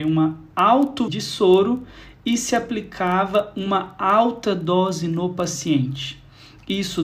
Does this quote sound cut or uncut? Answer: cut